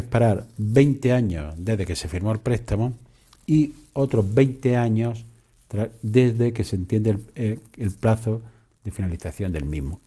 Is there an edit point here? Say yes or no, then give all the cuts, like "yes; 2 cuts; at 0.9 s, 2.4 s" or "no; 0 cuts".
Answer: no; 0 cuts